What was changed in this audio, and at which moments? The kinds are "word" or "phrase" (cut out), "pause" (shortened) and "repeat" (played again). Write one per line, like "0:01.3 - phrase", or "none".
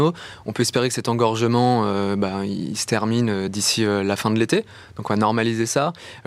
none